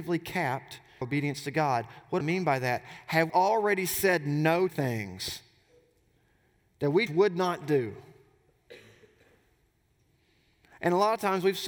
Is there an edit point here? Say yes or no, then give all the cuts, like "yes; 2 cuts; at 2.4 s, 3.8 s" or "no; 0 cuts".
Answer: yes; 5 cuts; at 1.0 s, 2.2 s, 3.3 s, 4.7 s, 7.1 s